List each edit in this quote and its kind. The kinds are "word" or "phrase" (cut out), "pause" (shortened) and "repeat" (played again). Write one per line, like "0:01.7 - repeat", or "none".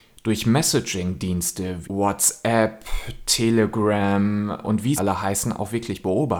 0:01.8 - word
0:04.6 - word
0:05.0 - word

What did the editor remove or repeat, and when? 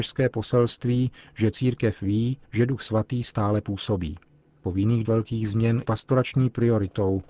0:02.4 - pause
0:04.6 - phrase
0:05.0 - word
0:05.8 - word

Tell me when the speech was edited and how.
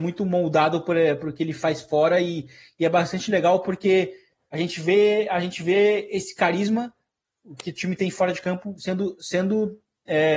none

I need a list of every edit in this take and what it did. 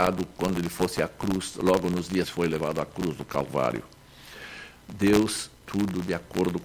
0:02.2 - word
0:05.6 - word

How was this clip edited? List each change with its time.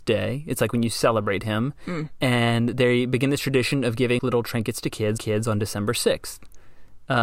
0:04.2 - word
0:05.2 - repeat

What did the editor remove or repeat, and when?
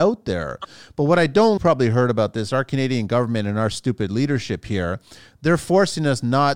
0:01.6 - phrase

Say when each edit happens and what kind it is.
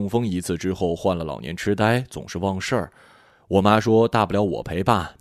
none

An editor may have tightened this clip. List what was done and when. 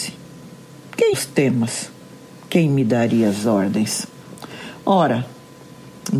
0:01.1 - word

